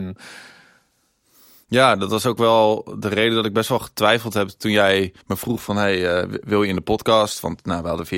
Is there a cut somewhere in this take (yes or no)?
yes